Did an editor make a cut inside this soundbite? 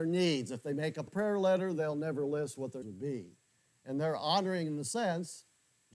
yes; 2 cuts; at 1.1 s, 2.8 s

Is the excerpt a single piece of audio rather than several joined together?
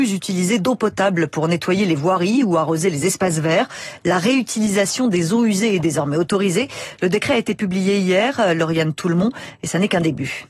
yes; 0 cuts

